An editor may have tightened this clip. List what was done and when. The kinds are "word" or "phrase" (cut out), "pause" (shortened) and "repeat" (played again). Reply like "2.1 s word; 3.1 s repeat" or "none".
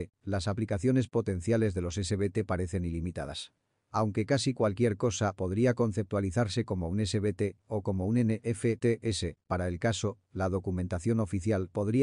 none